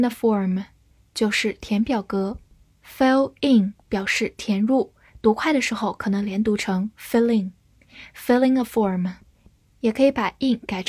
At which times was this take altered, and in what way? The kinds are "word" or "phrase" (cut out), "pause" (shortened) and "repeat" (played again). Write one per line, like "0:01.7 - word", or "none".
none